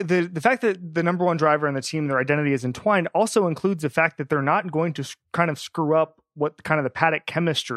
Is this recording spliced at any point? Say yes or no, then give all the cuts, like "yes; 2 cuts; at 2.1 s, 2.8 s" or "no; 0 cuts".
no; 0 cuts